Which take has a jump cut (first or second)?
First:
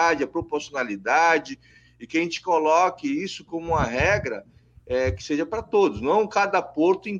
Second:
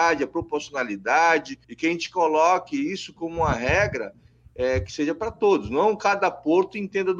second